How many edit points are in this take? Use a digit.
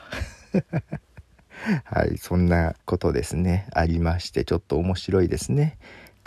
1